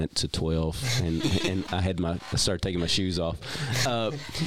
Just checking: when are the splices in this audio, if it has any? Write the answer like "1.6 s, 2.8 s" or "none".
1.6 s

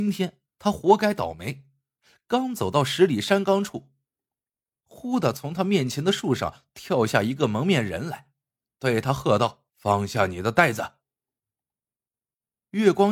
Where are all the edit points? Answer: 9.7 s

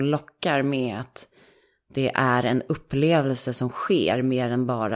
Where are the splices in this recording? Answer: none

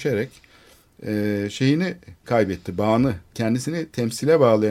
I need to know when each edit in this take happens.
2.2 s, 3.3 s

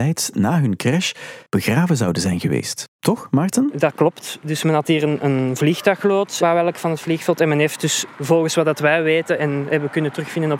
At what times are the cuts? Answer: 1.5 s, 6.4 s

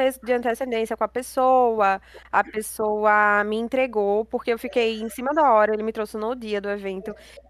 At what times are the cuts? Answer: none

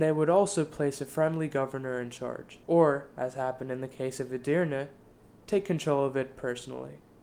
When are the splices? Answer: 2.6 s

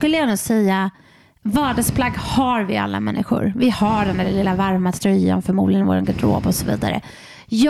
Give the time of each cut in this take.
none

